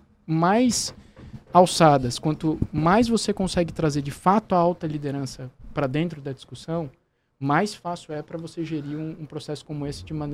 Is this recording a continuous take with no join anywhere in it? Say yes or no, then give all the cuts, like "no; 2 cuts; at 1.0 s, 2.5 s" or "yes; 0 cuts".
yes; 0 cuts